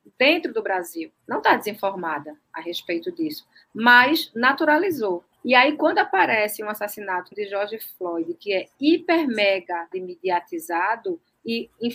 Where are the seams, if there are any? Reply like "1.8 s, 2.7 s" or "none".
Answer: 5.3 s, 7.3 s, 9.9 s